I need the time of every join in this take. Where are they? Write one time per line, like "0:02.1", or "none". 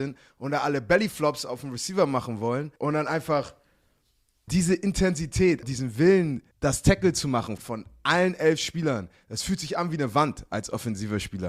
0:02.8
0:04.5
0:05.6
0:06.5
0:07.6